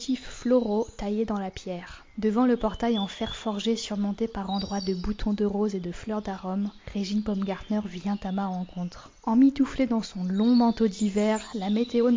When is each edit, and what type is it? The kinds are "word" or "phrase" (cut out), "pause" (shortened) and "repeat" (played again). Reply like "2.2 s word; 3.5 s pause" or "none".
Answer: none